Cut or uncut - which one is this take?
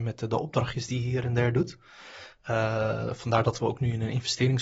uncut